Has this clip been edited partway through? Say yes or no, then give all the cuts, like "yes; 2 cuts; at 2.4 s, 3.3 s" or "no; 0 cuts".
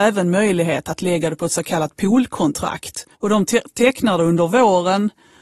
yes; 1 cut; at 3.1 s